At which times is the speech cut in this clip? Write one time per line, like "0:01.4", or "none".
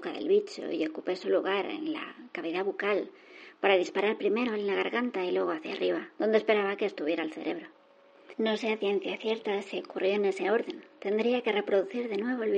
0:06.1